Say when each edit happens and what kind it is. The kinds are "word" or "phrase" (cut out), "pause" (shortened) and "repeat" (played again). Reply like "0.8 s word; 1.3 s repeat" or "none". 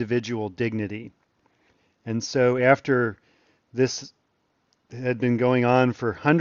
none